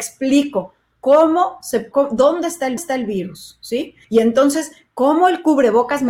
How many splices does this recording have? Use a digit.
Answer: 3